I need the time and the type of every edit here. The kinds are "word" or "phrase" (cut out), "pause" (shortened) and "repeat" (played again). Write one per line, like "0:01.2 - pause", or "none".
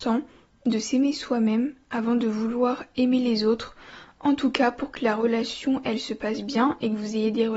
none